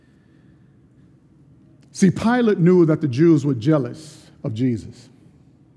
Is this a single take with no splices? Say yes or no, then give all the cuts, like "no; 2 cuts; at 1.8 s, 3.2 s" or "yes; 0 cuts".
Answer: yes; 0 cuts